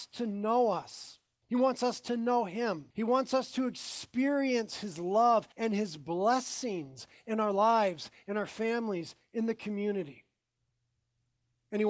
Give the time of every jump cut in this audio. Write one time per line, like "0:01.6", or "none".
0:02.9
0:05.5